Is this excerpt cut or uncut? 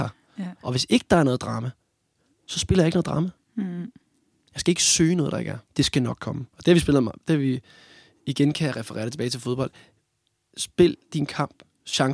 cut